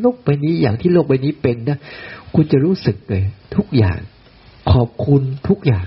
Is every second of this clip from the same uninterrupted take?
yes; 0 cuts

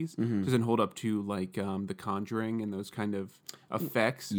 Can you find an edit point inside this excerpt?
no; 0 cuts

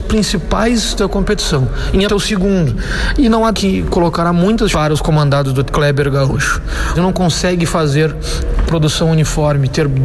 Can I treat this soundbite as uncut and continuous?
no; 7 cuts; at 1.0 s, 2.1 s, 3.5 s, 4.7 s, 5.7 s, 6.9 s, 8.7 s

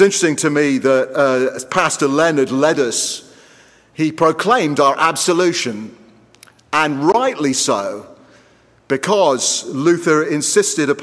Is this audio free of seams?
yes; 0 cuts

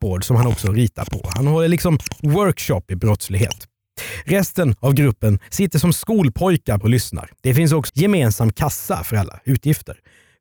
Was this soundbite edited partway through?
yes; 3 cuts; at 6.8 s, 7.3 s, 7.9 s

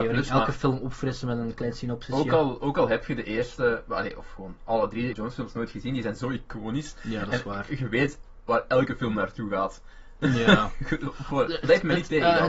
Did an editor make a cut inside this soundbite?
yes; 1 cut; at 5.1 s

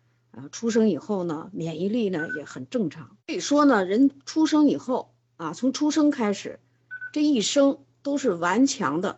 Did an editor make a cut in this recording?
yes; 1 cut; at 3.2 s

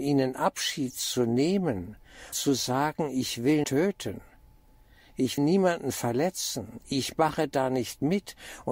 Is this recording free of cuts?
no; 3 cuts; at 2.3 s, 3.6 s, 5.4 s

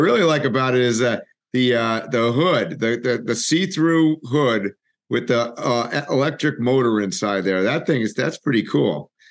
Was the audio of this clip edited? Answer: no; 0 cuts

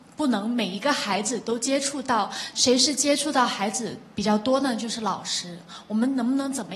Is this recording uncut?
no; 1 cut; at 2.5 s

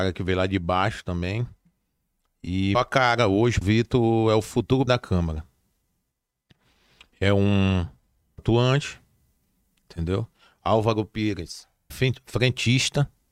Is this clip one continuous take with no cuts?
no; 5 cuts; at 2.7 s, 3.6 s, 4.9 s, 8.4 s, 11.9 s

